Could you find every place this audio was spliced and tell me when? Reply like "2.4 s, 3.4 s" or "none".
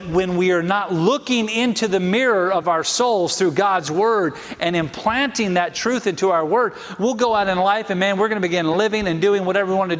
none